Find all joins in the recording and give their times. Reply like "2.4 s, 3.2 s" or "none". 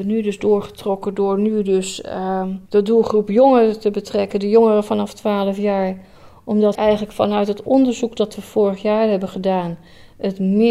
2.7 s, 6.7 s